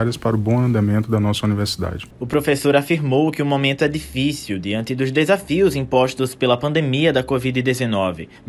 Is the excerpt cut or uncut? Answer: uncut